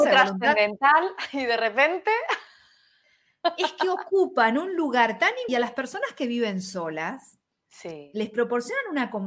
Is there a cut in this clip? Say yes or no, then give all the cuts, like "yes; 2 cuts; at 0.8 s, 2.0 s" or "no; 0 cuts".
yes; 1 cut; at 5.5 s